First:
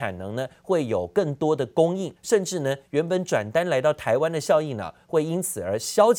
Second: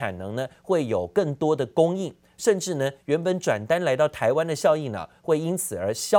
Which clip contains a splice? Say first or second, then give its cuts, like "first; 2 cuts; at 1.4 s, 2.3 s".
first; 1 cut; at 2.2 s